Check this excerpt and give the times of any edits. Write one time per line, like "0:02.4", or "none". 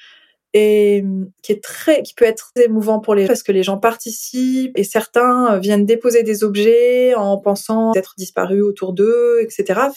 0:01.3
0:02.6
0:03.3
0:04.8
0:07.9